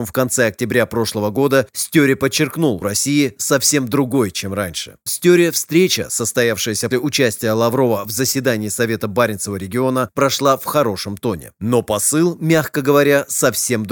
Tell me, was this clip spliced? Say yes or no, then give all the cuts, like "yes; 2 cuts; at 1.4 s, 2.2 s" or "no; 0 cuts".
yes; 3 cuts; at 2.8 s, 5.1 s, 6.9 s